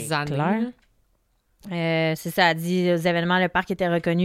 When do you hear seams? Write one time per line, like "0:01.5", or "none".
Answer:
none